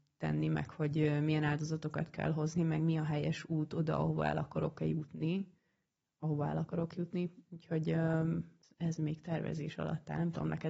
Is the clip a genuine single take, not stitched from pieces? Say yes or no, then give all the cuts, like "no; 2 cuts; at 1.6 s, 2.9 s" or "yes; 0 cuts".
no; 1 cut; at 8.6 s